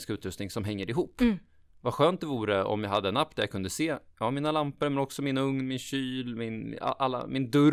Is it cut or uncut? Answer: uncut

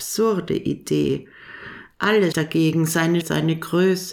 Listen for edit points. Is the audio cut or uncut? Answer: cut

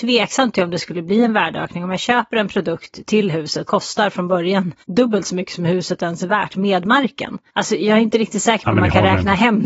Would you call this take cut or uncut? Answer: cut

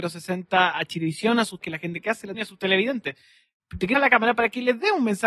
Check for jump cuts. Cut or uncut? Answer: cut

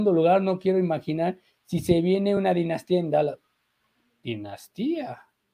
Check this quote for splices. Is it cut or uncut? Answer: uncut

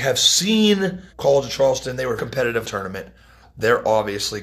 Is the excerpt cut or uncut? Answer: cut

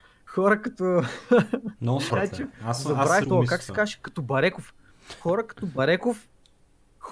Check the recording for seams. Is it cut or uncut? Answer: cut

